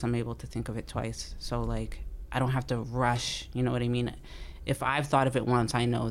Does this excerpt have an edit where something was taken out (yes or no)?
no